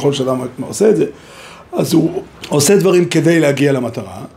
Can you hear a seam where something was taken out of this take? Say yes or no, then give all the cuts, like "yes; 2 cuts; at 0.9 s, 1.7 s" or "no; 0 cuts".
yes; 1 cut; at 2.4 s